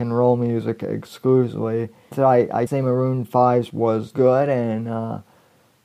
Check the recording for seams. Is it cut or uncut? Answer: cut